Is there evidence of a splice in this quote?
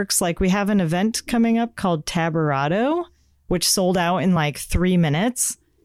no; 0 cuts

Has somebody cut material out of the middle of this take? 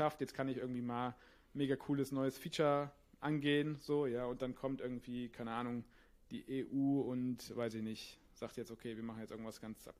no; 0 cuts

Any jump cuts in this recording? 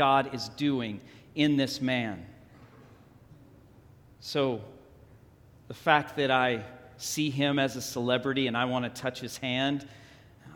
no; 0 cuts

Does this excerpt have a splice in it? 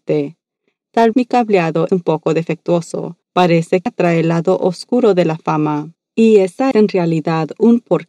yes; 6 cuts; at 1.1 s, 1.9 s, 3.2 s, 3.9 s, 6.0 s, 6.7 s

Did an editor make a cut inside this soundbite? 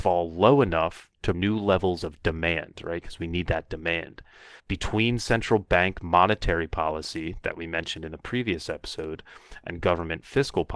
yes; 2 cuts; at 1.3 s, 4.6 s

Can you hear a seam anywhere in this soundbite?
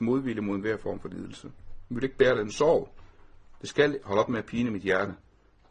no; 0 cuts

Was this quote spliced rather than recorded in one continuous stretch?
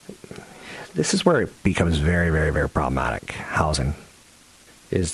no; 0 cuts

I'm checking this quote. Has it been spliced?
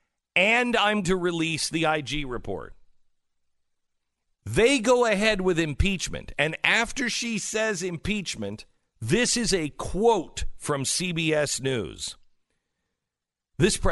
yes; 1 cut; at 1.0 s

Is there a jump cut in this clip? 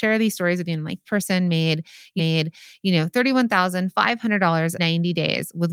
yes; 3 cuts; at 1.0 s, 2.2 s, 4.8 s

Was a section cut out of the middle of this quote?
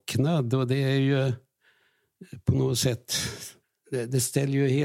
yes; 1 cut; at 3.6 s

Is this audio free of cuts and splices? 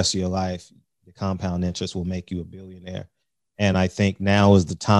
yes; 0 cuts

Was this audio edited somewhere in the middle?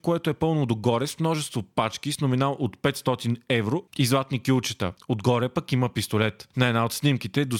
no; 0 cuts

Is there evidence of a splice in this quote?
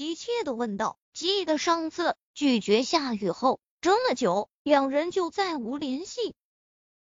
yes; 1 cut; at 1.0 s

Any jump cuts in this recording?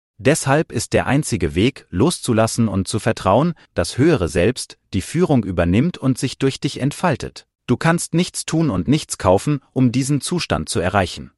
yes; 2 cuts; at 3.6 s, 7.5 s

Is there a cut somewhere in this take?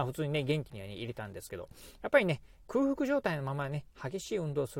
yes; 1 cut; at 2.6 s

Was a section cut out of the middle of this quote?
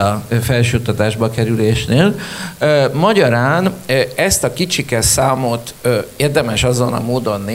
no; 0 cuts

